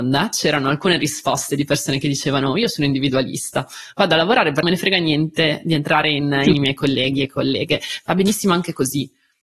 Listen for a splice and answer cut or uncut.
cut